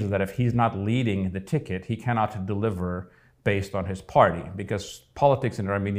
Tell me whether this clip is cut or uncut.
uncut